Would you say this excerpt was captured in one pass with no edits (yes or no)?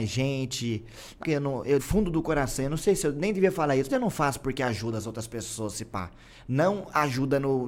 no